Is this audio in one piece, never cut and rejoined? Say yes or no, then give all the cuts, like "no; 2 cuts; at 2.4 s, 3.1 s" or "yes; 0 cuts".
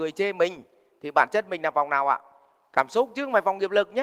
yes; 0 cuts